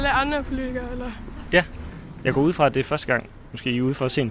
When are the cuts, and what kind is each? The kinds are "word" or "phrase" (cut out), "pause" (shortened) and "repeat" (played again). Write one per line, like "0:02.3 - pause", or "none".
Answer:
none

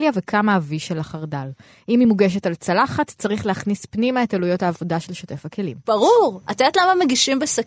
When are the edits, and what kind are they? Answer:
none

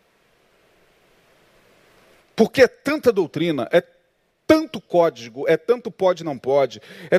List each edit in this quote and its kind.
none

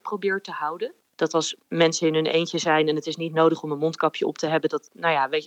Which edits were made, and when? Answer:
0:01.1 - pause

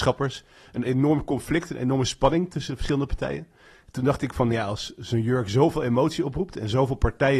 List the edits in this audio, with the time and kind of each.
none

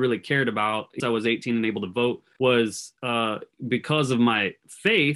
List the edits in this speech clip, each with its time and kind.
0:01.0 - phrase
0:02.3 - pause

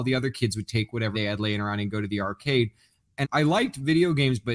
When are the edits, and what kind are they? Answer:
0:01.1 - word
0:03.2 - word

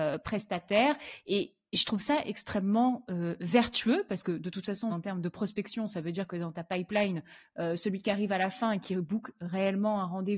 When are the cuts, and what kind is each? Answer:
0:04.9 - word

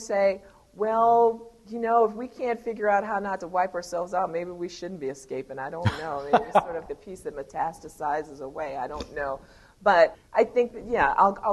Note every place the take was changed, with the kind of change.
0:06.9 - word
0:10.1 - word

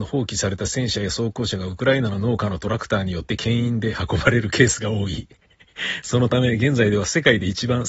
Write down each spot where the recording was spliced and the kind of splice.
0:05.4 - pause

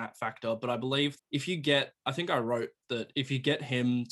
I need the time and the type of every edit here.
0:01.2 - word

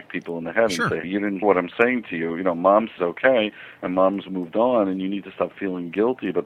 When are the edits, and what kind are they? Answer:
0:01.0 - phrase
0:01.4 - word
0:03.0 - phrase

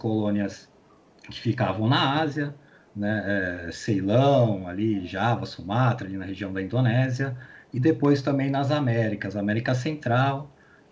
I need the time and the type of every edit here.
none

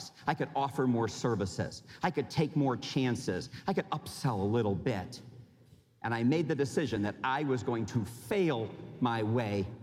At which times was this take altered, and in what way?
none

